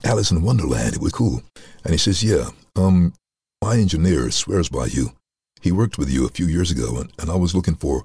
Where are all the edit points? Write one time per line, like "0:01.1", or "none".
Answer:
0:01.1

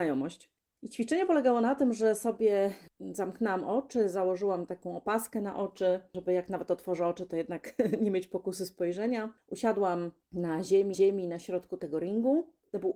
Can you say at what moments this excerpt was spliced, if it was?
0:10.9

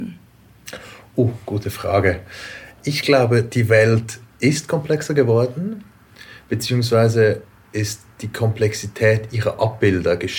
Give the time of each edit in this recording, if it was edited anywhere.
none

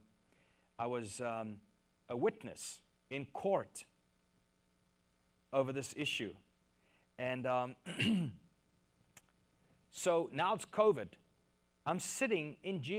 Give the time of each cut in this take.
none

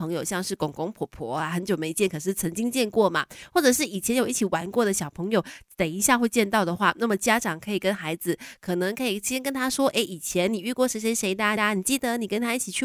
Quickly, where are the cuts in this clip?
0:11.6

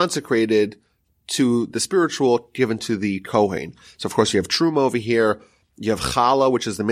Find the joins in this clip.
none

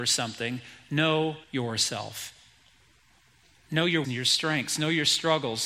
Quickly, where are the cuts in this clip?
0:01.4
0:04.0

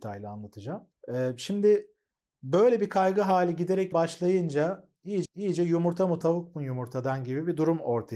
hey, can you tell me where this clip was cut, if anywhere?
0:00.9
0:03.9
0:05.2
0:06.2

